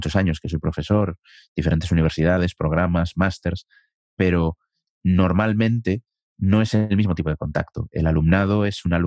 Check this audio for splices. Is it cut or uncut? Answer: uncut